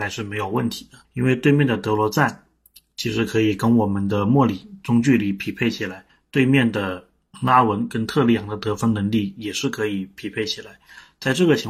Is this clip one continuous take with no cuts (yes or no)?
no